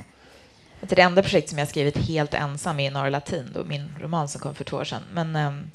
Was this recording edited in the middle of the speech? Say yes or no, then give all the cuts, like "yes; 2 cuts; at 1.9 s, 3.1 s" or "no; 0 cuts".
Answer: no; 0 cuts